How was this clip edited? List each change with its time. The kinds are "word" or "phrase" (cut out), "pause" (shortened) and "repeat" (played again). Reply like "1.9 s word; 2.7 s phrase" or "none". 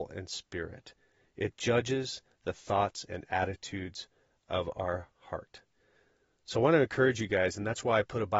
none